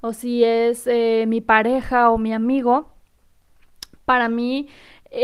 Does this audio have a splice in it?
no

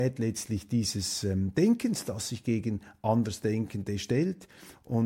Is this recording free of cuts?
yes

